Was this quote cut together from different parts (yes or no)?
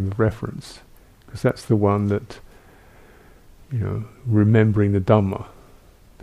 no